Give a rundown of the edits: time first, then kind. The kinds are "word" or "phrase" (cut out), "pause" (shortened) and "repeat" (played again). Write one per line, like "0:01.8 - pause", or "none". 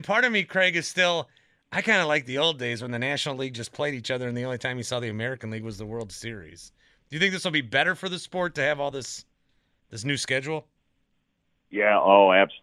none